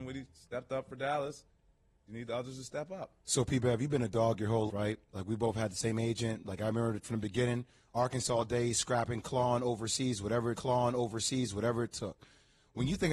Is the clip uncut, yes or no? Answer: no